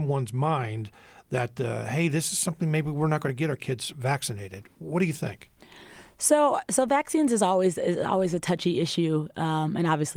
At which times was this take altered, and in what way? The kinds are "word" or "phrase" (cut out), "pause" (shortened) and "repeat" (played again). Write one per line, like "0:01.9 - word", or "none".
none